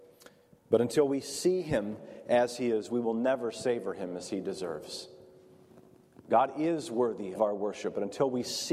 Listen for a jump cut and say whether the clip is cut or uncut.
cut